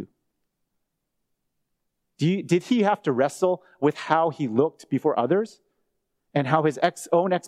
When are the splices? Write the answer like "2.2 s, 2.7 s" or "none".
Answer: none

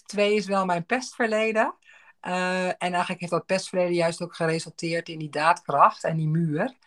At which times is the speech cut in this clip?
none

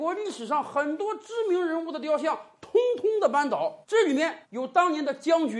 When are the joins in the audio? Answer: 3.8 s, 4.4 s

